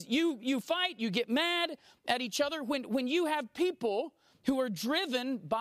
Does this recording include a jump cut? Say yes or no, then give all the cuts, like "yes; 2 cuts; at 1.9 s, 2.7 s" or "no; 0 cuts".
no; 0 cuts